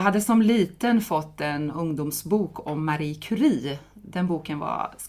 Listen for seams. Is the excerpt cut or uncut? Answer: uncut